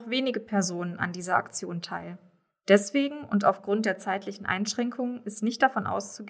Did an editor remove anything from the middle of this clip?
no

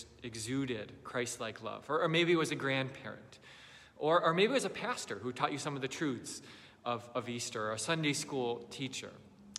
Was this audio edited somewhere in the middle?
no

